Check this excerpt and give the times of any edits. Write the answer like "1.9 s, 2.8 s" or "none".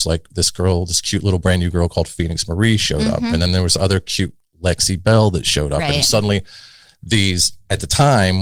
none